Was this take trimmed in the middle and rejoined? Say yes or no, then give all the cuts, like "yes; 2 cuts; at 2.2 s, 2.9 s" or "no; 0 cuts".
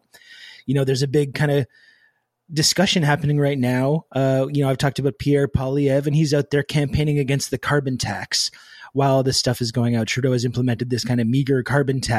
no; 0 cuts